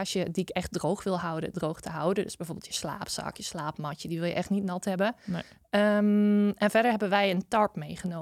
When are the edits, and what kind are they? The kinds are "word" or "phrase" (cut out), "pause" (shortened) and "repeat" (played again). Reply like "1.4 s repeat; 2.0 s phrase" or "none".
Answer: none